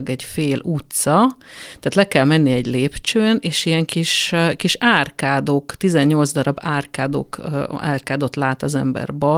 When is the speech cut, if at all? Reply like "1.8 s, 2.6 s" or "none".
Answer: none